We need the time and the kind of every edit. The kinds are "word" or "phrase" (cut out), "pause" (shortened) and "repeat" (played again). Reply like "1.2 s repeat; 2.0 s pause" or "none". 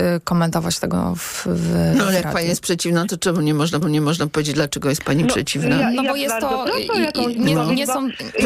3.8 s repeat